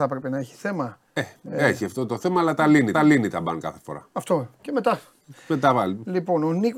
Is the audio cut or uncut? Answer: cut